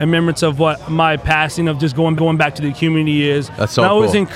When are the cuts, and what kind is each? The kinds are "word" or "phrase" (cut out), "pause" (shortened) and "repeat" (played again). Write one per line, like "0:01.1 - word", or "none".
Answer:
0:02.2 - repeat

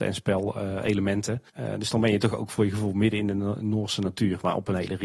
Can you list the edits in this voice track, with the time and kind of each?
0:01.5 - pause

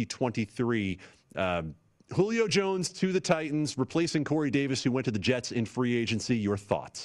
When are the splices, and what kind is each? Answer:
none

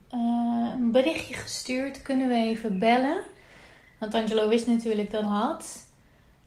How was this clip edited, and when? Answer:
0:05.2 - phrase

